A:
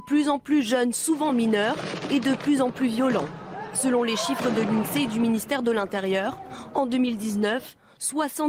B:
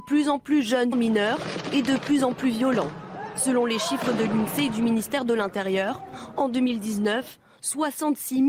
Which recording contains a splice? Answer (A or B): B